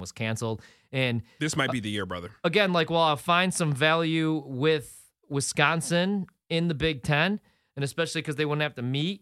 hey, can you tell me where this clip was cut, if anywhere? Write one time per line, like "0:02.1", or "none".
none